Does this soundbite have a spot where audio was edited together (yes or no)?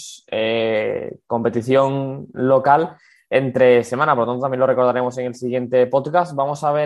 no